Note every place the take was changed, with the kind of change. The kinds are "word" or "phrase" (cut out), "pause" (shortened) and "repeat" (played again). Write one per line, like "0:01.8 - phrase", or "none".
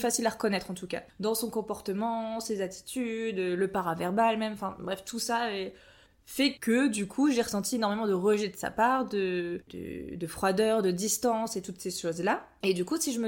0:01.1 - pause